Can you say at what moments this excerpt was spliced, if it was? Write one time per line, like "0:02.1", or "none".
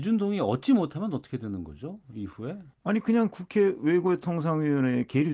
0:02.7